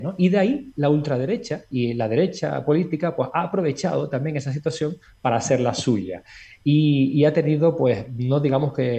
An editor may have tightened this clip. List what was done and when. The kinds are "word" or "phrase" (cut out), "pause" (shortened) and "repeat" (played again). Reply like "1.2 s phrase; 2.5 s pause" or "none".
none